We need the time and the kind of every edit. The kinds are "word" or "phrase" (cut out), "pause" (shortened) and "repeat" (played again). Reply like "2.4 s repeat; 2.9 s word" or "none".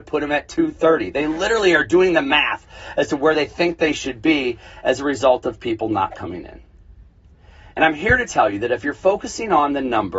none